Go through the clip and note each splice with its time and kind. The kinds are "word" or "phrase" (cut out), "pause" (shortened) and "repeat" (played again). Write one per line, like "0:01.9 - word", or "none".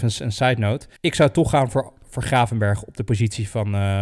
0:01.0 - pause